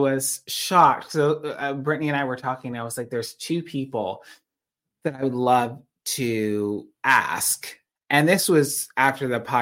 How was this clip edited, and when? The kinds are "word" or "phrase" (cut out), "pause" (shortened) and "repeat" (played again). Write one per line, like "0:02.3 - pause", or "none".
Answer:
none

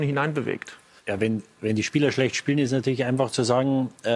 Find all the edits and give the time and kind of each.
0:01.0 - pause

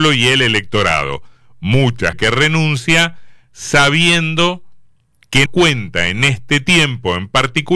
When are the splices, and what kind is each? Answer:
0:02.1 - word
0:05.5 - word

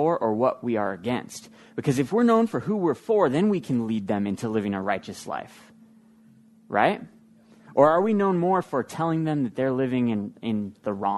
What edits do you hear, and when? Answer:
none

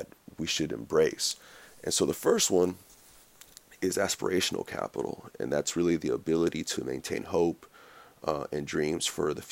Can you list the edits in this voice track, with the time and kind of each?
none

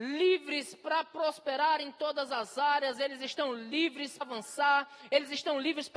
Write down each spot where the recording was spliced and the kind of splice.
0:04.2 - word

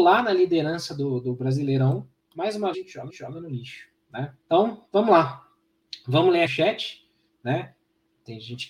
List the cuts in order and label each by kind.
0:02.7 - phrase
0:03.1 - repeat
0:04.4 - pause
0:06.5 - phrase

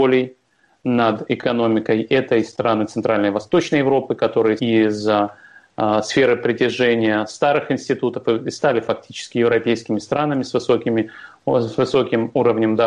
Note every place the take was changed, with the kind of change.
0:04.6 - phrase

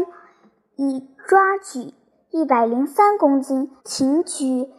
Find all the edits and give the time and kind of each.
0:03.8 - pause

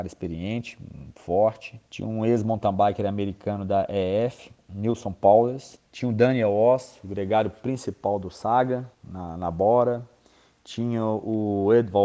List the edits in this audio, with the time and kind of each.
0:01.9 - pause
0:05.9 - pause
0:08.9 - pause

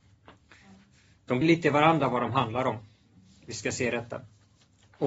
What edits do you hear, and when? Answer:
0:01.4 - phrase

